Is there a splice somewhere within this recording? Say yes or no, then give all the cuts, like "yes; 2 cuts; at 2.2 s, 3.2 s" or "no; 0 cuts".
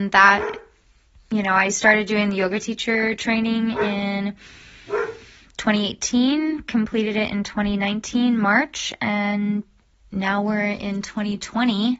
no; 0 cuts